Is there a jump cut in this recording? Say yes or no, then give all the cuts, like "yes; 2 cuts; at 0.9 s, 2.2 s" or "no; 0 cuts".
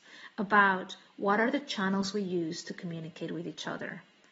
no; 0 cuts